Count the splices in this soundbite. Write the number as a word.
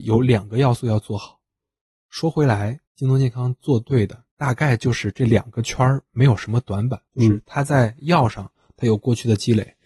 three